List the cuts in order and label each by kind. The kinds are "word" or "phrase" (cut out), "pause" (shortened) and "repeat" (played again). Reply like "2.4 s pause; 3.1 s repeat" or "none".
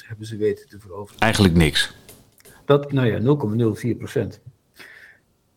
2.9 s word